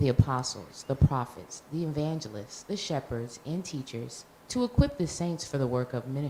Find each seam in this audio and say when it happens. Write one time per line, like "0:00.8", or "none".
0:04.4